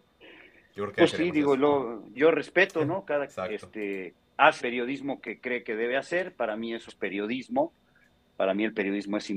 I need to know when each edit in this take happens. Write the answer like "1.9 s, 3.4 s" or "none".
1.1 s, 2.1 s, 3.3 s, 4.6 s, 6.9 s

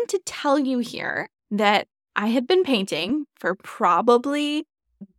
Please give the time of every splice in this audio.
1.4 s

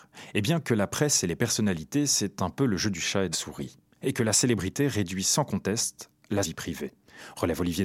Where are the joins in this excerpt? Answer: 3.3 s, 6.4 s

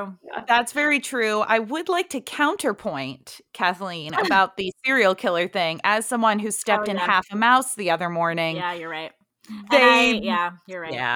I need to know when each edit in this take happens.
none

